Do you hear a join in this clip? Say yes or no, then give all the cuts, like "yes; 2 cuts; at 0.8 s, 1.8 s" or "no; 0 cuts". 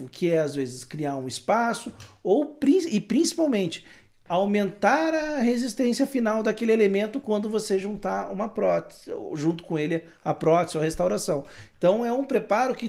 no; 0 cuts